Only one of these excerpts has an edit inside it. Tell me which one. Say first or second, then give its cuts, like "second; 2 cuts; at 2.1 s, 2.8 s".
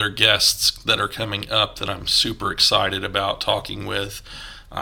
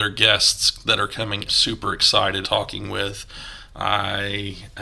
second; 2 cuts; at 1.5 s, 2.4 s